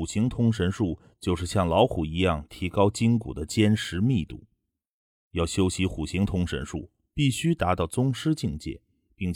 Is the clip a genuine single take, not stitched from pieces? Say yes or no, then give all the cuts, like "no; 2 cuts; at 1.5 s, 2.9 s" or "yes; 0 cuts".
yes; 0 cuts